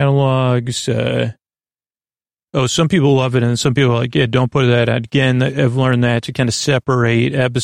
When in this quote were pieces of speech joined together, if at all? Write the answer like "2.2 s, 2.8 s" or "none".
none